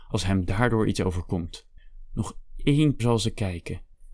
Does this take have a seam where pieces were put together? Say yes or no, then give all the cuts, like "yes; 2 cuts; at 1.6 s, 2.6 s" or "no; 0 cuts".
yes; 1 cut; at 3.0 s